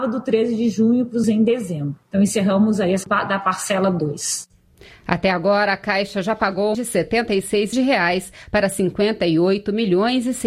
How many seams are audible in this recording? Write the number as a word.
four